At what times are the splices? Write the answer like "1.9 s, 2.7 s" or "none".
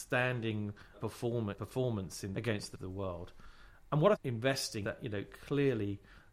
0.9 s, 1.5 s, 2.3 s, 2.7 s, 4.1 s, 4.8 s